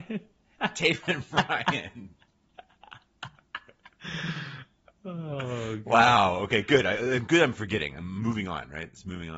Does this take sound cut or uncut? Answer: uncut